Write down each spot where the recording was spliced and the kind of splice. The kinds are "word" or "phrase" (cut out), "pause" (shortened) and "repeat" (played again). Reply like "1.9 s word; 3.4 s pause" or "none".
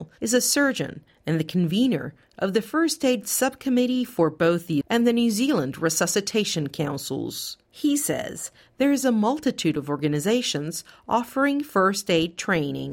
4.8 s word